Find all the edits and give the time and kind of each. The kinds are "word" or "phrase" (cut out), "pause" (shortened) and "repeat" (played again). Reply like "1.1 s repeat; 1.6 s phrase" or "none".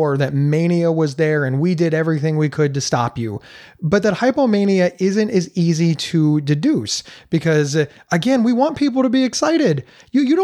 none